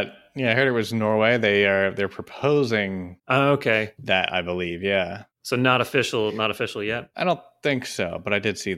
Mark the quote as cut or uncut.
cut